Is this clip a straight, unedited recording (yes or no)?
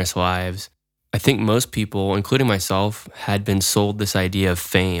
yes